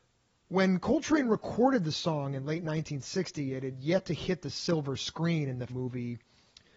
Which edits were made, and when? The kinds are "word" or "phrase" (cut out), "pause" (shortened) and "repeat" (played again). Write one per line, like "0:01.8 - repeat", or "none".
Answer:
0:05.7 - word